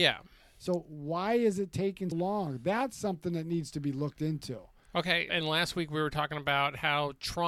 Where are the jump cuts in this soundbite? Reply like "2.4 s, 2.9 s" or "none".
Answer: 2.1 s, 5.4 s